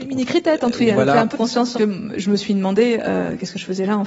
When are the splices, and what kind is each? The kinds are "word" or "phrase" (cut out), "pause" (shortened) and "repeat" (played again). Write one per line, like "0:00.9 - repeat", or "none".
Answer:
0:01.3 - word
0:01.7 - phrase